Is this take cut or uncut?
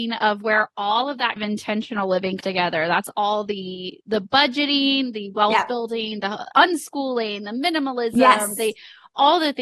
cut